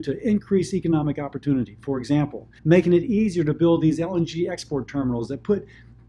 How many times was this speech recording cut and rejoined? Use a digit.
1